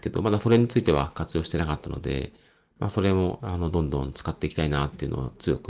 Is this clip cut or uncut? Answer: uncut